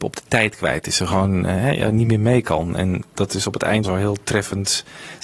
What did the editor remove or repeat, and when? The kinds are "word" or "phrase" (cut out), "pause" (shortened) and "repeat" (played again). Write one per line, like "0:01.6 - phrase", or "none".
0:03.8 - word